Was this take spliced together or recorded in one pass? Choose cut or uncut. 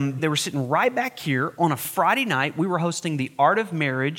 uncut